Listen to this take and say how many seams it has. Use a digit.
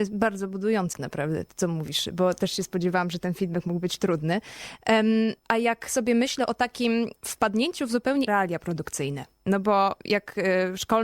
6